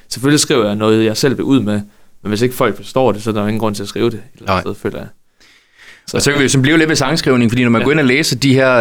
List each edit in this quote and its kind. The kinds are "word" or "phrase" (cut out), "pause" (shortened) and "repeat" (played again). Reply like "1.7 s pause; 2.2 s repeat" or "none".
none